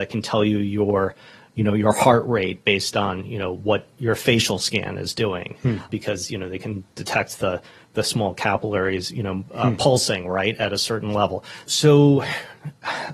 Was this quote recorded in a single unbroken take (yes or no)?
yes